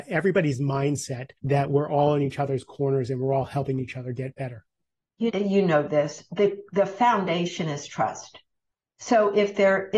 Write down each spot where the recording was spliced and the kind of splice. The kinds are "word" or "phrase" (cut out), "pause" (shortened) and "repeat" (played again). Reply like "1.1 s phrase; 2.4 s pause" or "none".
1.4 s pause; 5.3 s phrase